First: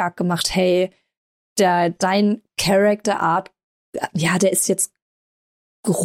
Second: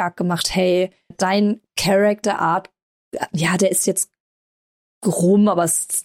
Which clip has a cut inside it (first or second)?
second